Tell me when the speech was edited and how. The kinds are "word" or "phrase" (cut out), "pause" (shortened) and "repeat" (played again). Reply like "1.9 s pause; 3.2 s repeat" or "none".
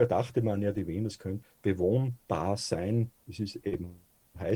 1.4 s word